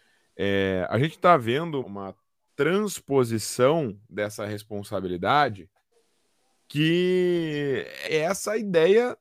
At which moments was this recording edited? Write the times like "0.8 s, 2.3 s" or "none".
1.8 s, 8.1 s